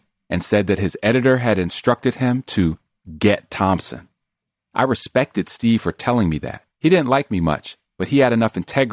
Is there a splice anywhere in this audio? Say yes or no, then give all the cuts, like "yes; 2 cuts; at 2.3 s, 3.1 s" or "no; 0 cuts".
yes; 1 cut; at 6.7 s